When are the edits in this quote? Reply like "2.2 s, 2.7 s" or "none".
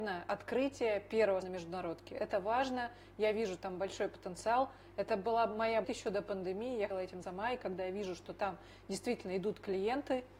1.4 s, 5.8 s, 6.9 s, 7.2 s